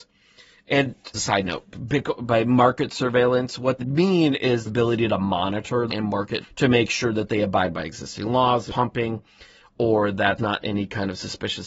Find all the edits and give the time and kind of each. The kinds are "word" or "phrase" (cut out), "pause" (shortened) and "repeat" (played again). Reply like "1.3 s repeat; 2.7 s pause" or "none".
1.1 s word; 3.8 s word; 4.7 s word; 5.9 s word; 6.4 s word; 8.7 s word; 10.4 s word